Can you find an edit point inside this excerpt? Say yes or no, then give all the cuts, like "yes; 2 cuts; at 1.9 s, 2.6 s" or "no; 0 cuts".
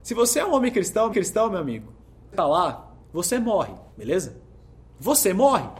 yes; 4 cuts; at 1.1 s, 2.3 s, 3.0 s, 3.9 s